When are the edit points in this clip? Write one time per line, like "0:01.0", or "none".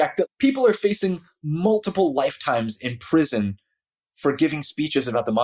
none